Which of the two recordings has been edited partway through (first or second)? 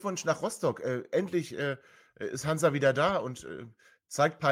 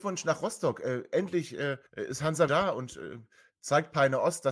second